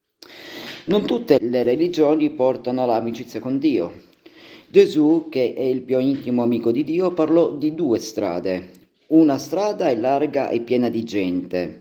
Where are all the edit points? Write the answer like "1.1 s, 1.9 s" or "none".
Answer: 1.4 s